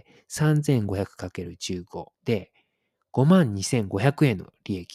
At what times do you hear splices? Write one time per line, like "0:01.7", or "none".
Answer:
0:02.1